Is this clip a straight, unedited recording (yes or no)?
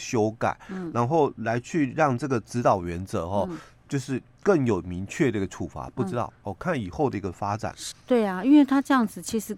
no